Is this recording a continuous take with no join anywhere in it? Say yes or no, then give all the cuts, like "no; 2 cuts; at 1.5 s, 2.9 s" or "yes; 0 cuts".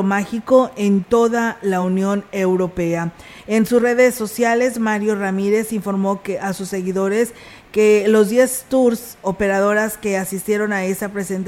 yes; 0 cuts